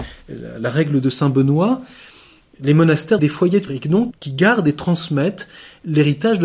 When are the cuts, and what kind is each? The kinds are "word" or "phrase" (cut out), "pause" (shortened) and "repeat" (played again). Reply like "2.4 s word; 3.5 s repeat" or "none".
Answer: 3.2 s word; 3.7 s word; 4.1 s word

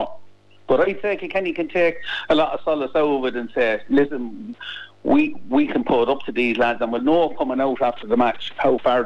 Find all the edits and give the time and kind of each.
none

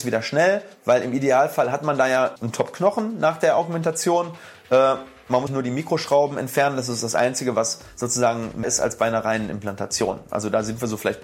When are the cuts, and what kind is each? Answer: 2.4 s word; 5.5 s word; 8.6 s word

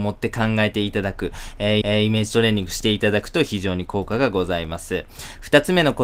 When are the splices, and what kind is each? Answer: 1.8 s repeat

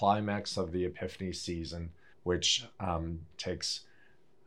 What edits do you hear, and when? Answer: 2.1 s pause; 3.3 s word

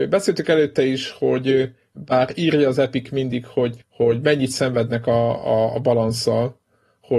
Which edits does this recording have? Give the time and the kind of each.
3.8 s pause

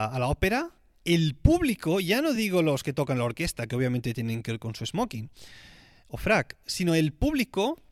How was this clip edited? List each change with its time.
none

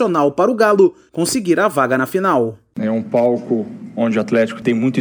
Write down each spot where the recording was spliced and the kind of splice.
none

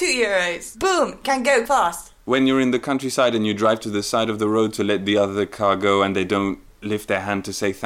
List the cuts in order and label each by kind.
1.7 s word

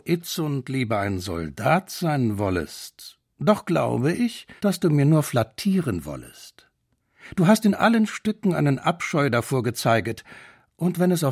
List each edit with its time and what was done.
4.6 s pause

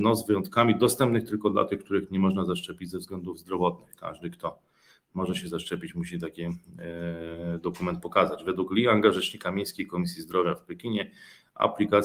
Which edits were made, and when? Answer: none

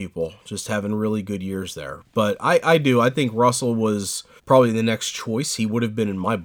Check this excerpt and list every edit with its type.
4.4 s pause

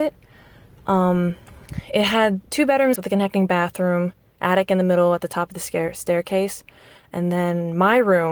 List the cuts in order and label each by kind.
2.5 s pause; 3.0 s word

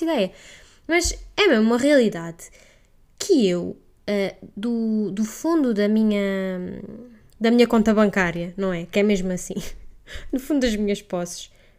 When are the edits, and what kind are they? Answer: none

